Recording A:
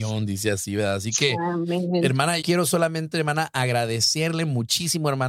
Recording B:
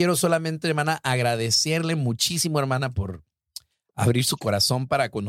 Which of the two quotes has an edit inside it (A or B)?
A